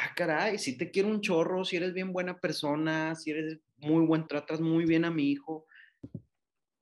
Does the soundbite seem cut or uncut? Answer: cut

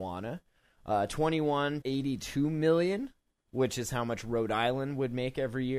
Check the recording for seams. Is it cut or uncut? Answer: cut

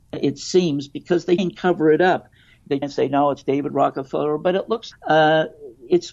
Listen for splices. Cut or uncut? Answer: cut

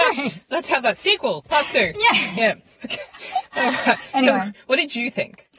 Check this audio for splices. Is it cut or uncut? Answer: uncut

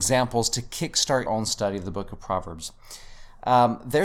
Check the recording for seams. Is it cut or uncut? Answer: cut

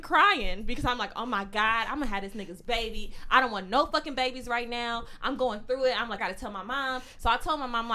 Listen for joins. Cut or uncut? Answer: cut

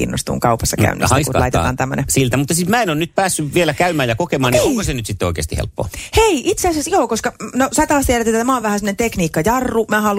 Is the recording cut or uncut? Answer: uncut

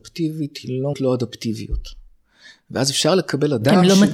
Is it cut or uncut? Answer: cut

